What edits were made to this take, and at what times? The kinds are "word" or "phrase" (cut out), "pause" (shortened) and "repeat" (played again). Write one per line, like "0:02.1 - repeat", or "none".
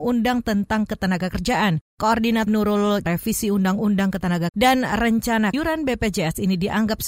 0:02.5 - word
0:03.0 - phrase
0:04.5 - word
0:05.5 - word